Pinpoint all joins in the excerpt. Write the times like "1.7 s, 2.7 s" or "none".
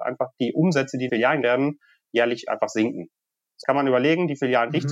1.1 s, 1.4 s, 3.6 s